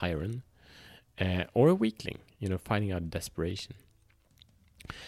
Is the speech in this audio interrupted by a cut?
no; 0 cuts

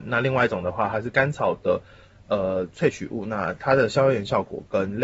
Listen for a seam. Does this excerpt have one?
no; 0 cuts

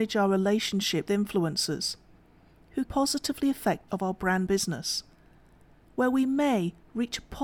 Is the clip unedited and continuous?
no; 4 cuts; at 1.1 s, 2.9 s, 3.9 s, 4.5 s

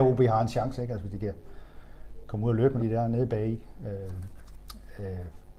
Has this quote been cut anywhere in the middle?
yes; 1 cut; at 2.8 s

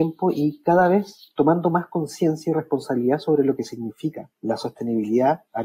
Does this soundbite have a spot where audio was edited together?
yes; 1 cut; at 4.3 s

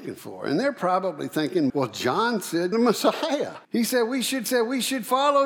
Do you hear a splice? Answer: yes; 4 cuts; at 1.7 s, 2.7 s, 3.6 s, 4.5 s

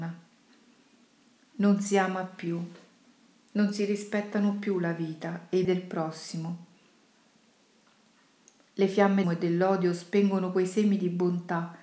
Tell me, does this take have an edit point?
yes; 2 cuts; at 5.6 s, 9.2 s

